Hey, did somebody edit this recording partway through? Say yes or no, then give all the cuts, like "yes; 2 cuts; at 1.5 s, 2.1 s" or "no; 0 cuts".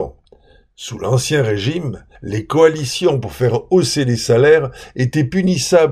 yes; 1 cut; at 2.2 s